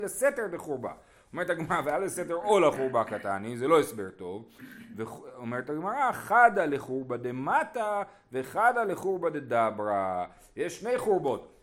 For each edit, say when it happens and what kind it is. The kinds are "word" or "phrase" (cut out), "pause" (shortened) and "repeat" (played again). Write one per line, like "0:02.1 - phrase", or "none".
none